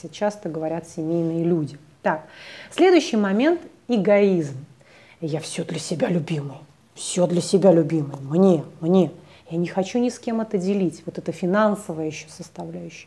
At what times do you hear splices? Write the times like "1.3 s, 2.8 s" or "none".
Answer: none